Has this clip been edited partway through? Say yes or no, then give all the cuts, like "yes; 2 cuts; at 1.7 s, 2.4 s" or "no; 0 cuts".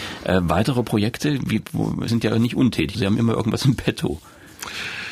yes; 2 cuts; at 2.1 s, 2.9 s